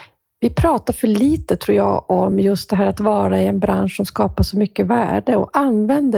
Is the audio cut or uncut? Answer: uncut